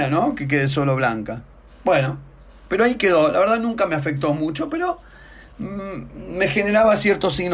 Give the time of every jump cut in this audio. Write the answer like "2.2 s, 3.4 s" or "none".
none